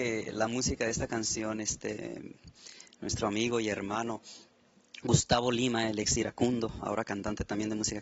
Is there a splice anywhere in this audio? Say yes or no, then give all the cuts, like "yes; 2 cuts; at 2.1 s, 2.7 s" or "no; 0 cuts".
no; 0 cuts